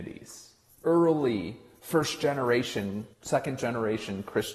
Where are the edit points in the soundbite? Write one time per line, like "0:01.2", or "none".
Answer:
0:03.1

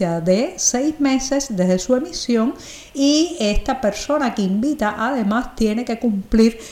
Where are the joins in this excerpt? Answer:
none

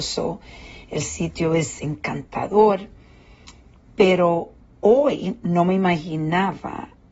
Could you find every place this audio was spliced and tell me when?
0:04.6

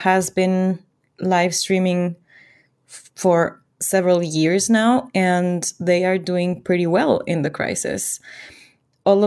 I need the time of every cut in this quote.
none

